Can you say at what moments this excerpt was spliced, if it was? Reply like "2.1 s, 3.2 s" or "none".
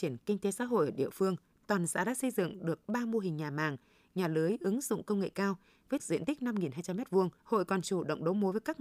1.5 s, 6.0 s, 7.4 s